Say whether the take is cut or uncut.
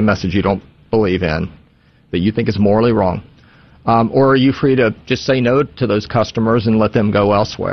uncut